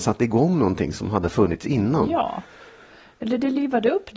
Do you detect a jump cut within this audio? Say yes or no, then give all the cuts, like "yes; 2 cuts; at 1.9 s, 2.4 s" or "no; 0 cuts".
no; 0 cuts